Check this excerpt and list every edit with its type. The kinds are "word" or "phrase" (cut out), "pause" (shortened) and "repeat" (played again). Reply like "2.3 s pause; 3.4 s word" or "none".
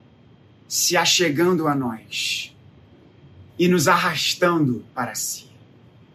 3.5 s pause; 4.9 s pause